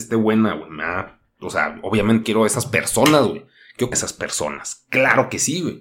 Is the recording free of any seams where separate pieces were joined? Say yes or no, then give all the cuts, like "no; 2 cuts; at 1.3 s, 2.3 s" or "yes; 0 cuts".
no; 2 cuts; at 2.2 s, 3.9 s